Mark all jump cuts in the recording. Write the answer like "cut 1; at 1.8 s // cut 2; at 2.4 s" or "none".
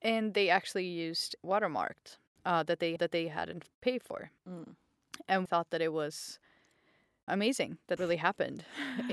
cut 1; at 1.4 s // cut 2; at 3.0 s // cut 3; at 4.4 s // cut 4; at 5.5 s // cut 5; at 7.3 s // cut 6; at 8.0 s